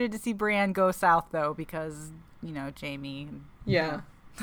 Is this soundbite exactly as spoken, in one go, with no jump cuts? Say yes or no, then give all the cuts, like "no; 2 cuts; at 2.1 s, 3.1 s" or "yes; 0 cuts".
no; 1 cut; at 3.5 s